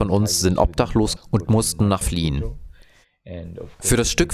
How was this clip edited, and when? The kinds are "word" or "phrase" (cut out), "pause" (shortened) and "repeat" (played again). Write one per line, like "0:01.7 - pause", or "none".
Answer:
0:01.2 - word
0:02.0 - word